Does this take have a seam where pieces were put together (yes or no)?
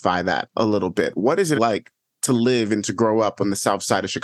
yes